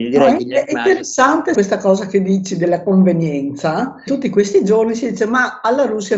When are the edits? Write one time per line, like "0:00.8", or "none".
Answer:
0:01.5
0:04.1